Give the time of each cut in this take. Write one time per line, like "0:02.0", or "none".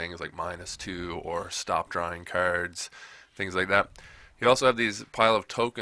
none